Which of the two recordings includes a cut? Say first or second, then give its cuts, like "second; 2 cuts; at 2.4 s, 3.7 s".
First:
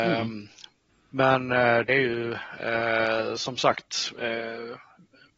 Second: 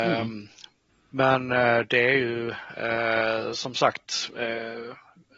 first; 1 cut; at 1.9 s